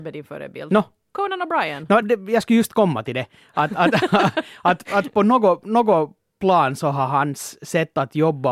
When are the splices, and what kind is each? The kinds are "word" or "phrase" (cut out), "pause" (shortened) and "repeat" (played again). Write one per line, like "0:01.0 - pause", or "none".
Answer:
0:02.0 - phrase